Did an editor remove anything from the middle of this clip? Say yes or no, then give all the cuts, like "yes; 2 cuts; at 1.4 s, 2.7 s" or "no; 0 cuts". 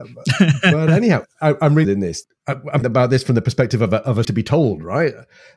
yes; 4 cuts; at 1.2 s, 1.8 s, 2.8 s, 4.2 s